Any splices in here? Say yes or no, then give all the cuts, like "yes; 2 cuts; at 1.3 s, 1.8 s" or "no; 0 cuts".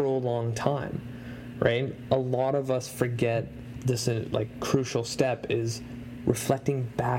no; 0 cuts